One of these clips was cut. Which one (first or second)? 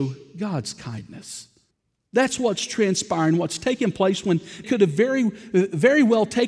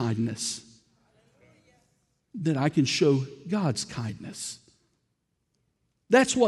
first